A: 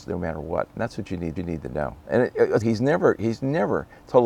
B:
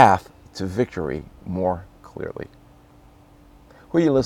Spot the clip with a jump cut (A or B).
A